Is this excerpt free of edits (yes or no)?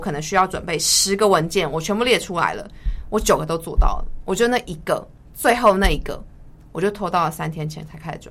yes